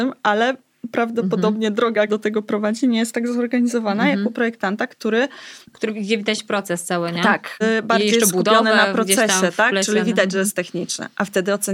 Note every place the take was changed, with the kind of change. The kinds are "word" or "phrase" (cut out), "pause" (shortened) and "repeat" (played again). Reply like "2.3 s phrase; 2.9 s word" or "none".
2.1 s word; 5.6 s pause; 7.6 s word